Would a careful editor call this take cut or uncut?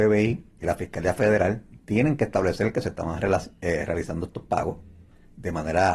uncut